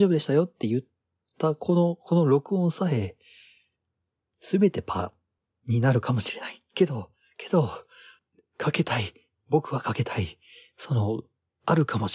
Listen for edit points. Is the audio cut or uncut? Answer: uncut